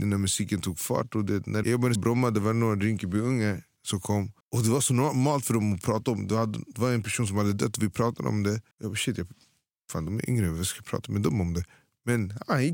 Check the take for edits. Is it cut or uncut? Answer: cut